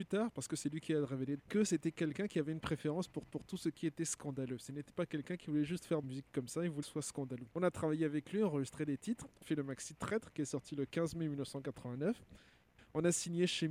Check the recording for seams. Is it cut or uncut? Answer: cut